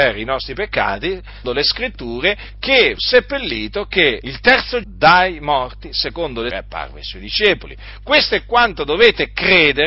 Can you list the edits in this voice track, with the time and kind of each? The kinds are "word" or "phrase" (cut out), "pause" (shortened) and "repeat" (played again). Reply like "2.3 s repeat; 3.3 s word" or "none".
1.4 s word; 3.0 s word; 4.2 s word; 4.8 s word; 6.5 s word